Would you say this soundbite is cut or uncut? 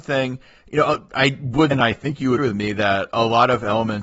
cut